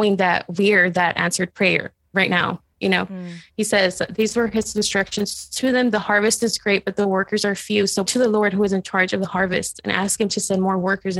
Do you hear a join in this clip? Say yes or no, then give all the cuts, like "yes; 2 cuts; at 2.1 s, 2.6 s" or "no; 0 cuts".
yes; 1 cut; at 8.0 s